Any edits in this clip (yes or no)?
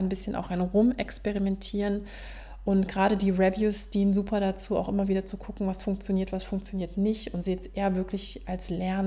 no